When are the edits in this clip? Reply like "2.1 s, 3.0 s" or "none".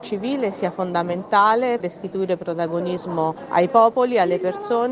1.8 s